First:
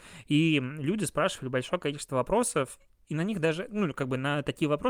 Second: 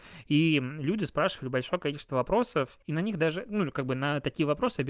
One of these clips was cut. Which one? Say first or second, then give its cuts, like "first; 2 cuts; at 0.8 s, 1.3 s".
second; 1 cut; at 2.8 s